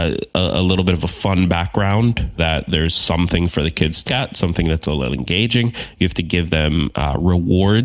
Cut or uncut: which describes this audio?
cut